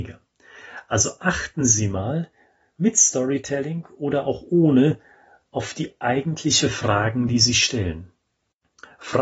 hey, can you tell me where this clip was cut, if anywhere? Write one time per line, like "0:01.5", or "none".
none

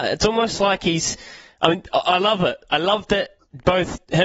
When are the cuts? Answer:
none

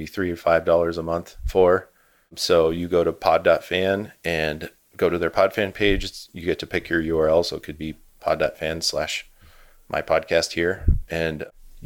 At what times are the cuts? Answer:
none

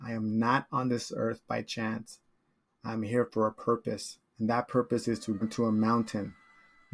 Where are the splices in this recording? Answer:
0:05.4

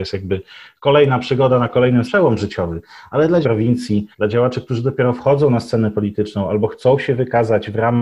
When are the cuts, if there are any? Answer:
0:02.1
0:03.4
0:04.1

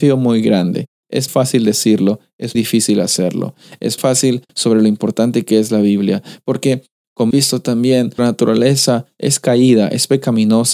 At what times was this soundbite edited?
0:01.3
0:02.5
0:04.0
0:04.5
0:07.3
0:08.2

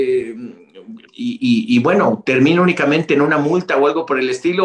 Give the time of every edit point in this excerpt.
0:01.1

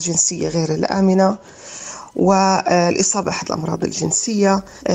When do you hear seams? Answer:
0:03.2

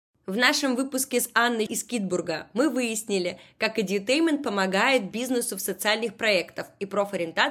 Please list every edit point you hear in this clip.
0:01.7

